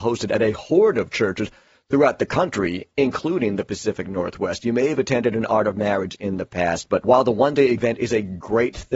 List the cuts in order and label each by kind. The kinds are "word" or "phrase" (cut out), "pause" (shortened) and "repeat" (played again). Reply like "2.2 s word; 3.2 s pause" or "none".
none